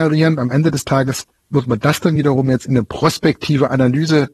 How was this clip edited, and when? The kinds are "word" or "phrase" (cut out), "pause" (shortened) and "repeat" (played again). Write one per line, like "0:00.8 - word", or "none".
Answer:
none

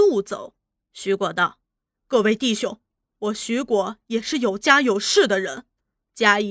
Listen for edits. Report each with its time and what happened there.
none

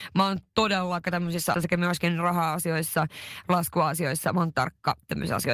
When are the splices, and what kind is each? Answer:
0:01.0 - word
0:01.5 - word
0:04.5 - word

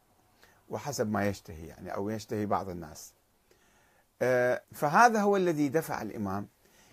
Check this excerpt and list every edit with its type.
0:04.6 - pause

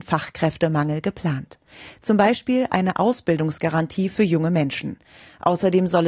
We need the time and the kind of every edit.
none

